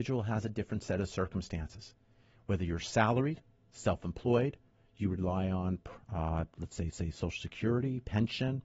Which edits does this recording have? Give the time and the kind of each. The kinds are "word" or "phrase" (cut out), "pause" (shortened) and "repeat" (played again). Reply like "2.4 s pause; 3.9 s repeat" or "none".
6.9 s repeat

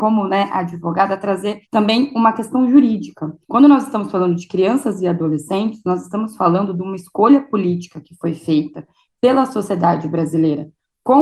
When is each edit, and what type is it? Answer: 1.6 s pause; 3.4 s pause

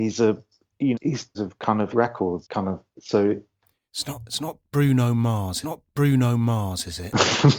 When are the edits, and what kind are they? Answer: 0.9 s word; 1.3 s phrase; 1.9 s word; 2.4 s word; 2.9 s pause; 5.6 s repeat

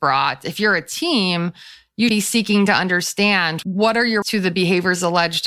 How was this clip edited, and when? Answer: 2.1 s word; 3.6 s word; 4.2 s word

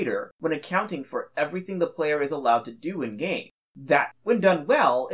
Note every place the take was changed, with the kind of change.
4.1 s word

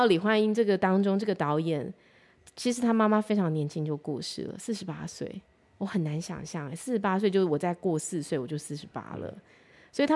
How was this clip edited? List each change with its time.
none

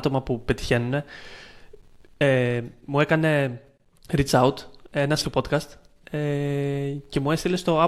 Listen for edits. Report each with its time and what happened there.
3.9 s pause; 5.2 s word

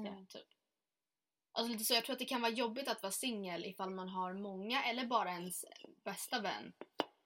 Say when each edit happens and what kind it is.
none

